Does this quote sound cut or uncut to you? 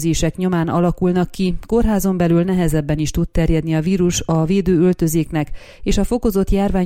uncut